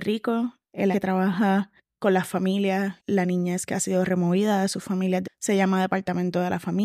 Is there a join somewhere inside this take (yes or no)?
yes